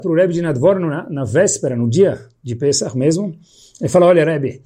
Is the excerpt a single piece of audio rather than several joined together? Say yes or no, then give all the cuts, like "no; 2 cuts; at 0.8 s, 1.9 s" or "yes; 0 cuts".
yes; 0 cuts